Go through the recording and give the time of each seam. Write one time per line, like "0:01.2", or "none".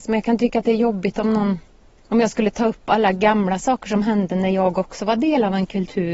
0:01.9

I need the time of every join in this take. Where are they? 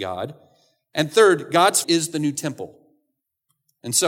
0:01.8

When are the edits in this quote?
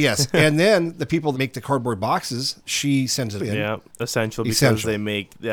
0:01.3
0:02.7
0:03.4

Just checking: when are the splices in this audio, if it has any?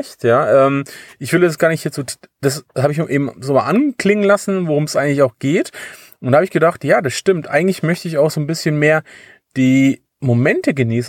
none

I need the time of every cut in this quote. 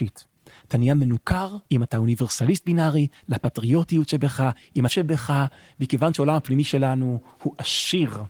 0:01.7
0:04.9

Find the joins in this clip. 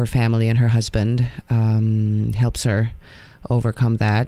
none

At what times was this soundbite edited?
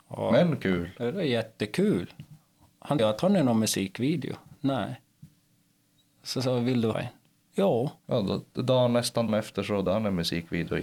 0:03.0
0:06.9
0:08.0
0:09.3
0:09.9

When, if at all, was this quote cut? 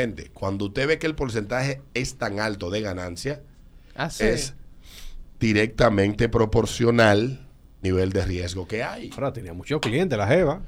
0:01.9
0:04.2
0:07.8

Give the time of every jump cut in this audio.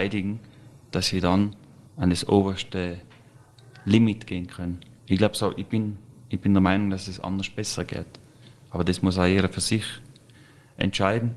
0:01.9
0:05.0

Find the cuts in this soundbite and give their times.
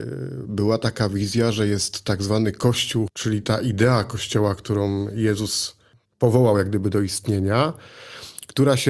none

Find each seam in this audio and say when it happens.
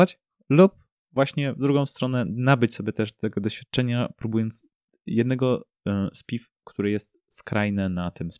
none

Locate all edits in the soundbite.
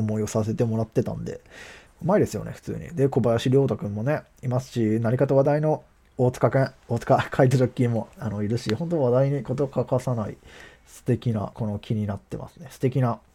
0:01.9
0:11.5

